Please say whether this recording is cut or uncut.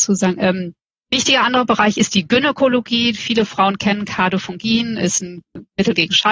uncut